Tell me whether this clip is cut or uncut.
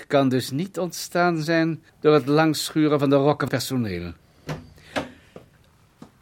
cut